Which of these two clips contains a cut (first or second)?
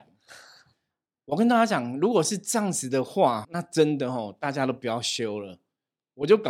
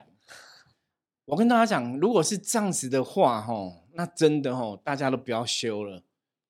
first